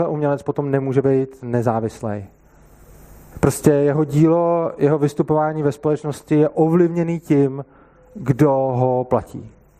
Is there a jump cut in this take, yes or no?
no